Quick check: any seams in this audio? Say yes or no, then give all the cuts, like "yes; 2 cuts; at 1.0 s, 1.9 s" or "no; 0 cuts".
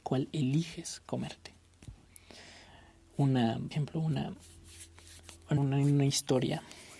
yes; 2 cuts; at 3.7 s, 5.6 s